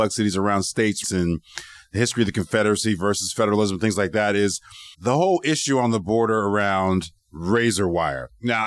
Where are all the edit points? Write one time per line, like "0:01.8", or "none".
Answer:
0:01.0
0:04.9
0:07.2